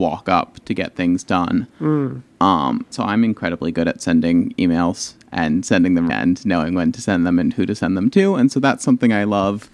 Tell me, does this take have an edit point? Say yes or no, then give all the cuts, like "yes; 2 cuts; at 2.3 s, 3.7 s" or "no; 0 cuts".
yes; 2 cuts; at 2.9 s, 6.1 s